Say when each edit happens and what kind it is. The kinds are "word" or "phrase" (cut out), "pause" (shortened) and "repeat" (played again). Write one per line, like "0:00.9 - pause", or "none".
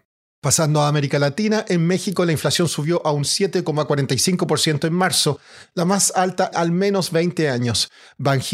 0:06.5 - word